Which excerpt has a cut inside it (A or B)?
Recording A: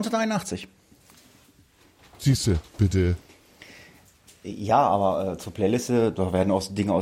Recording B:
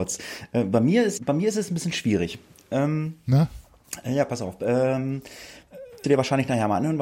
B